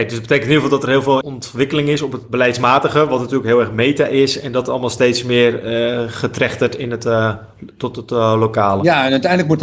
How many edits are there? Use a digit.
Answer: 1